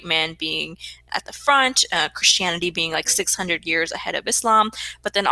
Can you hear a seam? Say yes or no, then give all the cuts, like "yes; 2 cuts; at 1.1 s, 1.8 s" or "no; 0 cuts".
no; 0 cuts